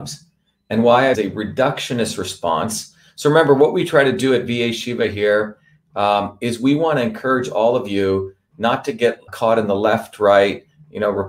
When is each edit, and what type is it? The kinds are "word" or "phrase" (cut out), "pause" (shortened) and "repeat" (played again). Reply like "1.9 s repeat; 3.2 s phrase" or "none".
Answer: 1.1 s phrase; 9.3 s word